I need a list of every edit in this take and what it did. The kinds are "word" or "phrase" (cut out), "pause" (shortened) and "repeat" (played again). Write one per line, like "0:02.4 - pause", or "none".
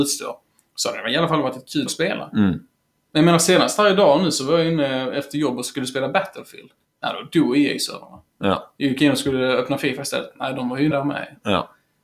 0:01.9 - word
0:06.8 - pause
0:10.9 - word